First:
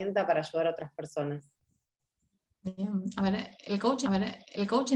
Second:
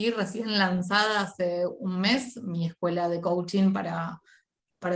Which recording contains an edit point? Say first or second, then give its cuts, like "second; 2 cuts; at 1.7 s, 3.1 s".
first; 1 cut; at 4.0 s